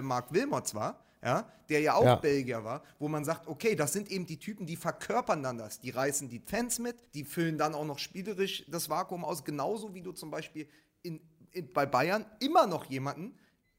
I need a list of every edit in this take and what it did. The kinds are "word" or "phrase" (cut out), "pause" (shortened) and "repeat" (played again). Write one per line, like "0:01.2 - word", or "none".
0:07.1 - pause